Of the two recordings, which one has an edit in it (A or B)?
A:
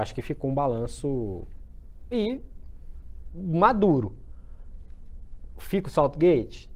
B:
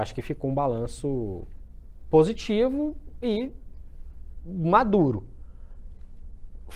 A